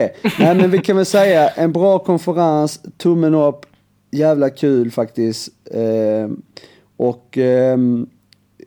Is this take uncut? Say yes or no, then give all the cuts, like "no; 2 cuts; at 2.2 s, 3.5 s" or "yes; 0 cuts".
yes; 0 cuts